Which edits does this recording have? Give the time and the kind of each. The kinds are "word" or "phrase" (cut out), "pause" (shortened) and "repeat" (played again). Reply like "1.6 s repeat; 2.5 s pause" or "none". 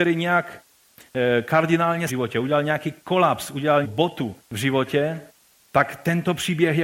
2.1 s phrase; 3.8 s word; 4.4 s pause